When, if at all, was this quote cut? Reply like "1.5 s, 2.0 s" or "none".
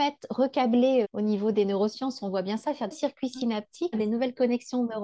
1.0 s, 2.9 s, 3.9 s